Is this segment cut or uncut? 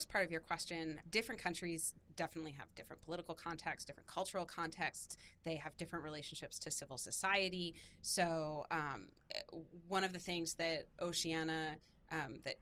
cut